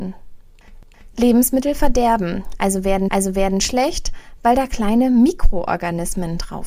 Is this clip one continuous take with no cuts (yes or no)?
no